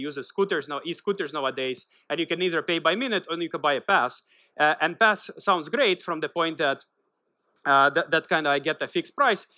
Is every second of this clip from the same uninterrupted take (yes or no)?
yes